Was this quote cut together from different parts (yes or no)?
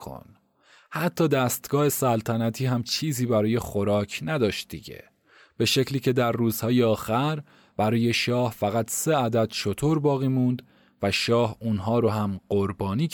no